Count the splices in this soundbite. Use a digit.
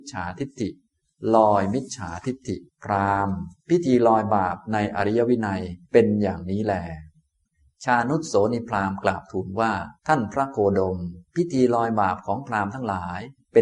6